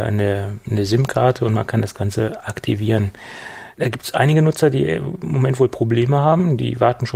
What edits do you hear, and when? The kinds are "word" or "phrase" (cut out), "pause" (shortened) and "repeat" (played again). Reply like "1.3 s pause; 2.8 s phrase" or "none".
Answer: 3.7 s pause